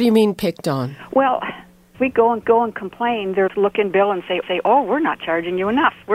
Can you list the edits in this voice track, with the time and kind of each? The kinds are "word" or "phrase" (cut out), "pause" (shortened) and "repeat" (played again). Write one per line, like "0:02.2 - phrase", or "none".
0:01.9 - word
0:02.4 - repeat
0:03.5 - word
0:03.9 - word
0:04.4 - repeat

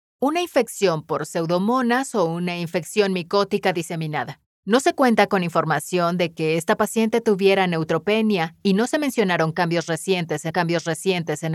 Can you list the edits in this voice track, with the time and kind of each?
0:04.5 - pause
0:10.5 - repeat

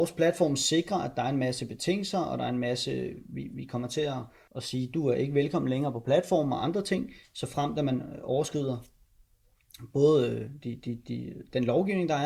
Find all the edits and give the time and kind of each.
0:04.5 - word

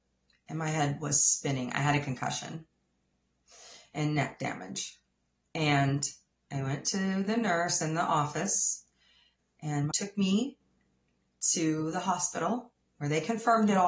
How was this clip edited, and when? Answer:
0:09.9 - word

